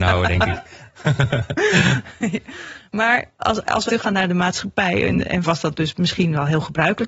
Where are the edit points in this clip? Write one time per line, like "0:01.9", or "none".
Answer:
0:03.3
0:03.9
0:05.4